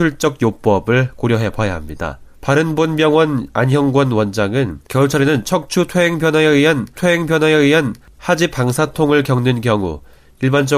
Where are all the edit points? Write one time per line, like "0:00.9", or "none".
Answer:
0:02.3
0:04.8
0:07.0